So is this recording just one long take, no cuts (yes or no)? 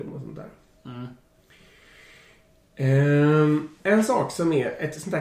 no